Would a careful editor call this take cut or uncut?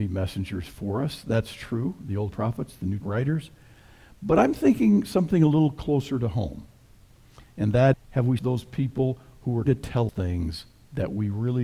cut